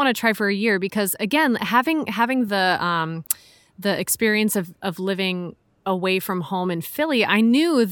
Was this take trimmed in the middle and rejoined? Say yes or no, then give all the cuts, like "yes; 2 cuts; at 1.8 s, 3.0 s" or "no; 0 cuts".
no; 0 cuts